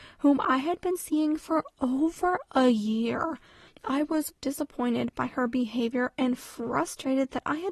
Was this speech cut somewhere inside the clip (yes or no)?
yes